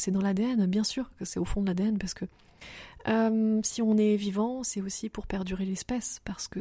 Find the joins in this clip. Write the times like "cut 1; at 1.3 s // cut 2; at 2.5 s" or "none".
none